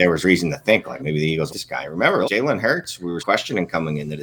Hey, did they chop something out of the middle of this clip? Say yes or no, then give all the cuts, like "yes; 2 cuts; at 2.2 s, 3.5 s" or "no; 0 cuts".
yes; 4 cuts; at 1.0 s, 1.5 s, 2.2 s, 3.2 s